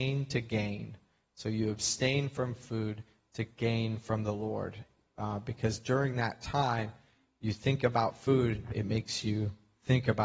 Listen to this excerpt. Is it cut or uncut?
uncut